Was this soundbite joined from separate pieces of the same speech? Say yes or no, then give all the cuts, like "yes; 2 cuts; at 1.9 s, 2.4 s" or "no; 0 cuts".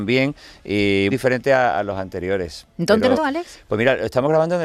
yes; 2 cuts; at 1.1 s, 3.2 s